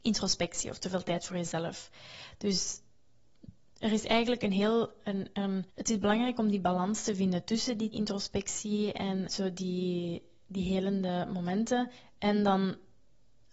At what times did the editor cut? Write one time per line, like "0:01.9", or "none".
0:05.7
0:07.9
0:09.3